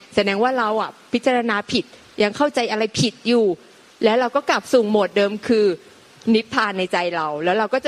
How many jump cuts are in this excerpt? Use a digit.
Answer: 1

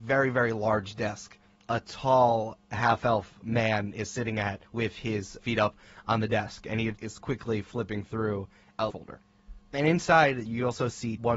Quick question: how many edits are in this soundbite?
4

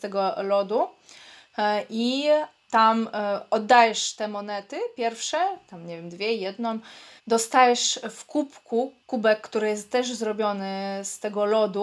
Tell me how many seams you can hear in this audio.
2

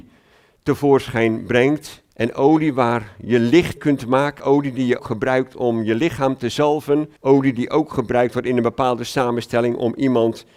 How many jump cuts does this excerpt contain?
5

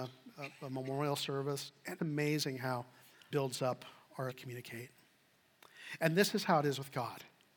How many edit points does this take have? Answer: 3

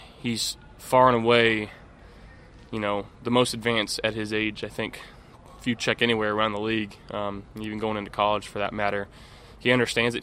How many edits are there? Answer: 0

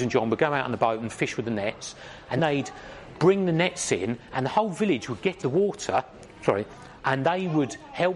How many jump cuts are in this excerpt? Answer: 3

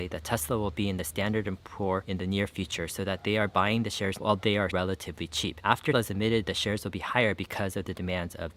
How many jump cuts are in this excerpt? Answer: 3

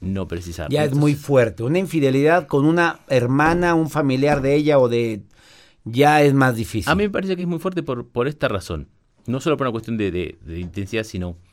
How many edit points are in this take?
0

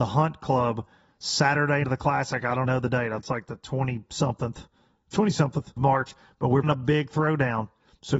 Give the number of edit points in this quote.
5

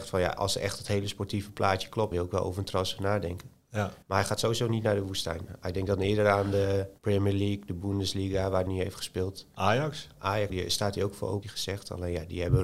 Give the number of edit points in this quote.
6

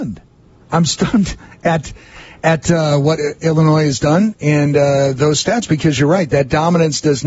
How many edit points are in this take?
0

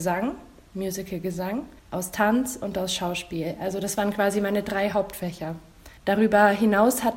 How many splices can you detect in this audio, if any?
2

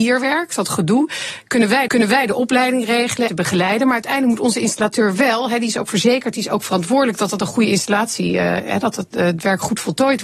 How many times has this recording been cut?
2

